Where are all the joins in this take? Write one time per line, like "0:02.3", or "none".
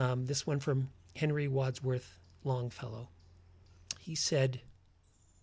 none

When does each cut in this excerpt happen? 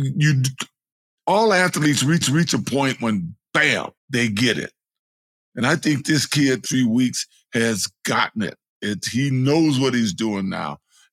0:02.2
0:04.0
0:06.7

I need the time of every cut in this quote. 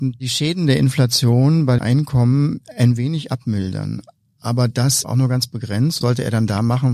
0:01.8
0:05.0
0:06.0

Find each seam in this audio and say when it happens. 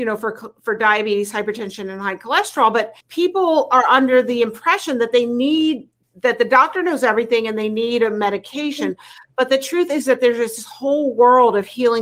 0:03.0
0:06.0

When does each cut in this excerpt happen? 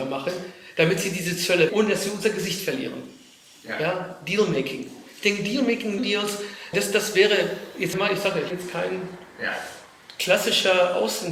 0:01.7
0:06.0
0:06.7
0:07.9
0:08.5

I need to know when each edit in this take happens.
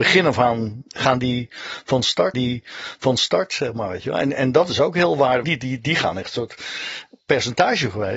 0:02.3
0:05.4

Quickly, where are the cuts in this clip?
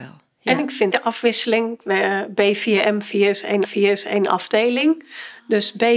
0:00.9
0:03.6

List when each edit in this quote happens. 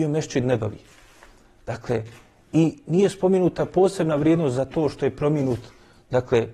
none

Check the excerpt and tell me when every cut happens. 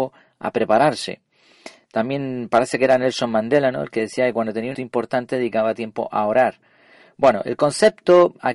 0:04.7

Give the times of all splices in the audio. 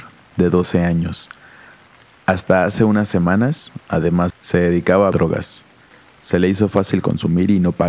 0:04.3
0:05.1

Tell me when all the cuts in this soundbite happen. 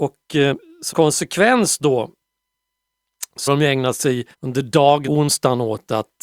0:00.9
0:03.5
0:04.3
0:05.1

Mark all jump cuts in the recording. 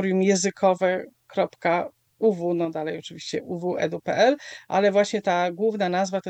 none

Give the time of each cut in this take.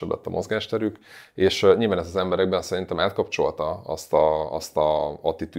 none

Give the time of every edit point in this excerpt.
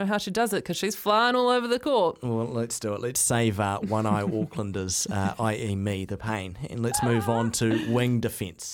none

